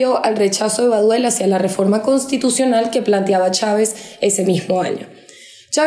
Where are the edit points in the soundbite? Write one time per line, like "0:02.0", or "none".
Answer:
none